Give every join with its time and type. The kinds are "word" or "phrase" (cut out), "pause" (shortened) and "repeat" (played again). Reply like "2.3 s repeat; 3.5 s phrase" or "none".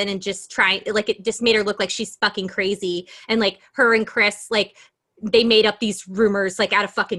none